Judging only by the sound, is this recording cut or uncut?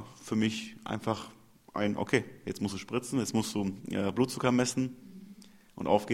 uncut